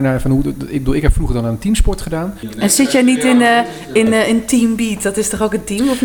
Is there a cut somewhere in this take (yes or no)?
no